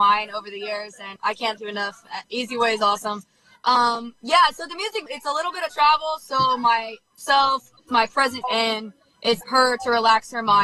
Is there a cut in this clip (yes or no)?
yes